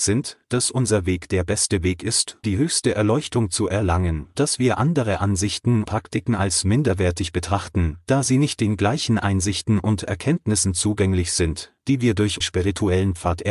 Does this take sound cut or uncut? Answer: cut